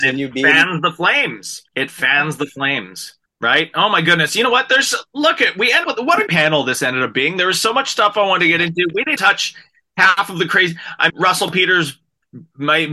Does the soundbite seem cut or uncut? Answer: cut